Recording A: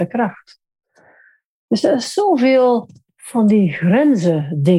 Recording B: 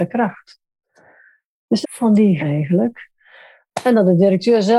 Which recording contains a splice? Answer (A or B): B